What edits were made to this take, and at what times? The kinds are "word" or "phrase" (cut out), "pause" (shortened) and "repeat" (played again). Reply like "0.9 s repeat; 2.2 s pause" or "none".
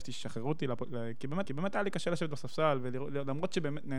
1.5 s repeat